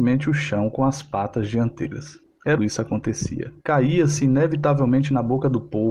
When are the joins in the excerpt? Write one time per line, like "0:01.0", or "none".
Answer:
0:02.2
0:02.6
0:03.6